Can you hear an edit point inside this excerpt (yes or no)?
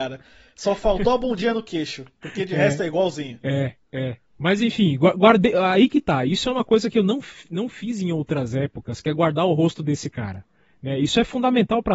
no